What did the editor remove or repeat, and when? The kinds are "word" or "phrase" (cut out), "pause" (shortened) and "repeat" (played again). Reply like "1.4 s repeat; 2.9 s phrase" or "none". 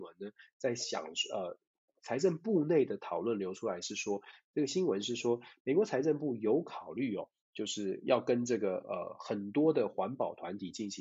none